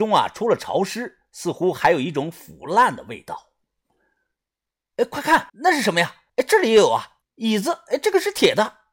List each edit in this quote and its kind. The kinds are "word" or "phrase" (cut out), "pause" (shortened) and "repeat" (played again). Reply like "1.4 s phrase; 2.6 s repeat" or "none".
5.5 s pause; 6.3 s pause; 7.2 s pause